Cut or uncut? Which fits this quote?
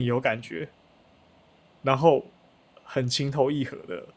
cut